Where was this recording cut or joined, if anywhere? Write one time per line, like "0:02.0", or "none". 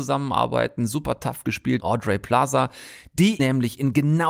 0:01.8
0:03.4